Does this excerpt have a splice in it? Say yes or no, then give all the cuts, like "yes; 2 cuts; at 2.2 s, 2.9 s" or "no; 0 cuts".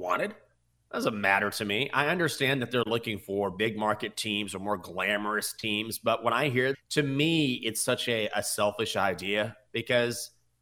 yes; 1 cut; at 6.7 s